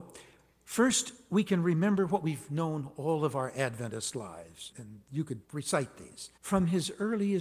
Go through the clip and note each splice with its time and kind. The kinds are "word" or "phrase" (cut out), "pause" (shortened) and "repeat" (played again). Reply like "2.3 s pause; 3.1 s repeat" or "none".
4.7 s word; 5.4 s pause; 6.4 s pause